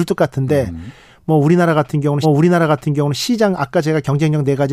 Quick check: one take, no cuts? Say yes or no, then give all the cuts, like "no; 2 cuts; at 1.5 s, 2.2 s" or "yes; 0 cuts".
no; 1 cut; at 2.2 s